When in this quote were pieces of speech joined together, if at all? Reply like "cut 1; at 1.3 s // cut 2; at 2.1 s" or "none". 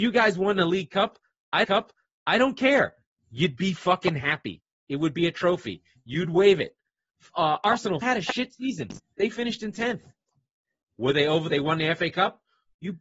cut 1; at 1.6 s // cut 2; at 8.0 s // cut 3; at 11.5 s

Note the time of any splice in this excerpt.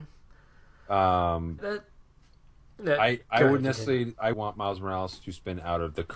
cut 1; at 1.6 s // cut 2; at 4.3 s

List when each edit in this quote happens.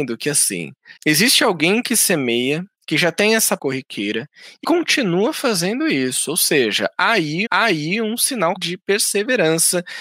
cut 1; at 1.0 s // cut 2; at 2.7 s // cut 3; at 3.6 s // cut 4; at 4.6 s // cut 5; at 7.5 s // cut 6; at 8.6 s

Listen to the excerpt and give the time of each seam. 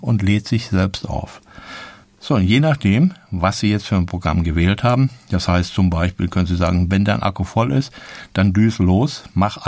none

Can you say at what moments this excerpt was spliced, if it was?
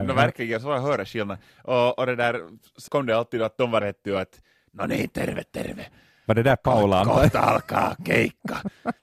cut 1; at 2.9 s // cut 2; at 3.8 s

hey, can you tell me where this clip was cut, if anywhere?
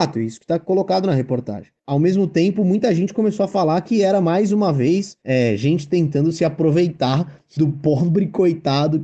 cut 1; at 1.8 s

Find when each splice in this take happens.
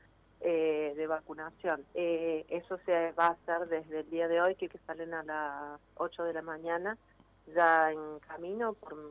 cut 1; at 1.9 s // cut 2; at 4.7 s

